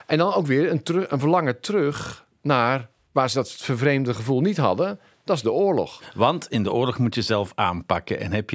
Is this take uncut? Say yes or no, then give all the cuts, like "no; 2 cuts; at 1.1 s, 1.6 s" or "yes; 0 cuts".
yes; 0 cuts